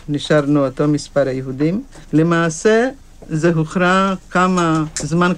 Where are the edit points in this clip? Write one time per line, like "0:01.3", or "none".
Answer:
0:02.0